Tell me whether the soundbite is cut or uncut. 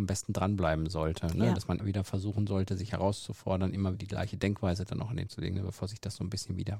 cut